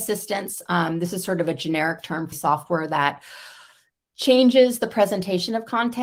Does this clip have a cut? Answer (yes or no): yes